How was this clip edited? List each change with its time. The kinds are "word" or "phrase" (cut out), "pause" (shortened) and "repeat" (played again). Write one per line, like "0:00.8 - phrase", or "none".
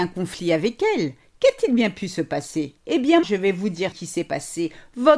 0:02.8 - pause
0:03.2 - word
0:03.9 - word